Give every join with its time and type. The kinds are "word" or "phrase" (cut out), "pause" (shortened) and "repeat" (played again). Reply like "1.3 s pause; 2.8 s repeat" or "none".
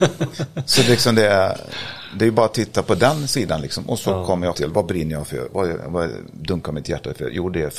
4.5 s word